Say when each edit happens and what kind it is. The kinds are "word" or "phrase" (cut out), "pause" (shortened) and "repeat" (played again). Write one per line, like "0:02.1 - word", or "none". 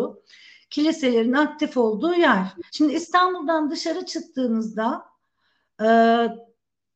0:02.7 - pause

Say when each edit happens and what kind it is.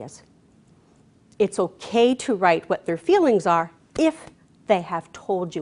none

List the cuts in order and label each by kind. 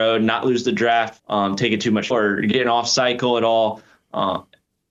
0:01.2 - word
0:02.1 - word

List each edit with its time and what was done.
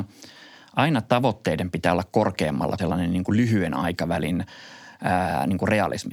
0:02.8 - phrase

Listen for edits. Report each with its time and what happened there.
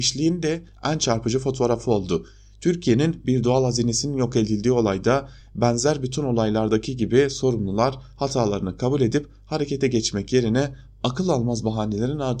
none

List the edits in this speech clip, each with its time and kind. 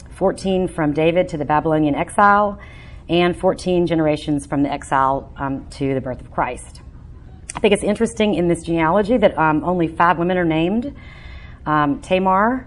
none

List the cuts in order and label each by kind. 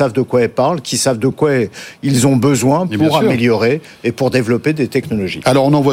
none

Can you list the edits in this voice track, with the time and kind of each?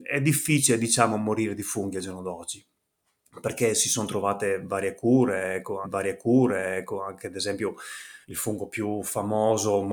0:05.8 - repeat
0:08.2 - pause

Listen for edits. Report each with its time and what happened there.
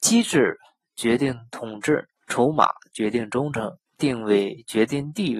0:02.2 - pause
0:03.9 - pause

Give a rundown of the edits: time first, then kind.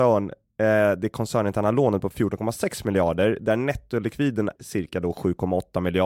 0:04.6 - word

